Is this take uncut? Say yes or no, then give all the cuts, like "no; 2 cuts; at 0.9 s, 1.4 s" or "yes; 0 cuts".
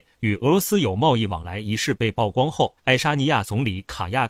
no; 1 cut; at 2.8 s